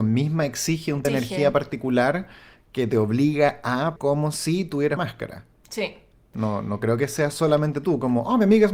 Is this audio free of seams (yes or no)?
no